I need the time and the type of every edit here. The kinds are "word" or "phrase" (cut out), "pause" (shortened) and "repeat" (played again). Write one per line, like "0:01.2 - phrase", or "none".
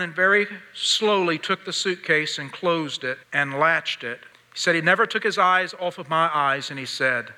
0:03.2 - pause
0:04.3 - pause